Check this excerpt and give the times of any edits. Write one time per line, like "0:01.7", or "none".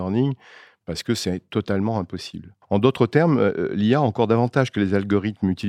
0:02.6